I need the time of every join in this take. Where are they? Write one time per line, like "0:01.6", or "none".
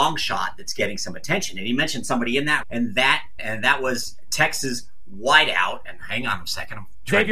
0:02.6
0:03.4